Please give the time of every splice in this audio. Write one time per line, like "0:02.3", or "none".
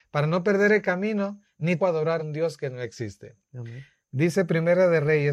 0:01.8
0:02.2